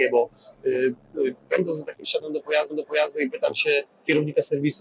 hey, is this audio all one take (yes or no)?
no